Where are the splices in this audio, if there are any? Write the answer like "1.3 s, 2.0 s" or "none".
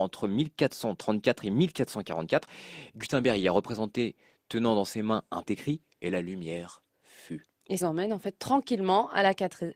5.5 s, 7.8 s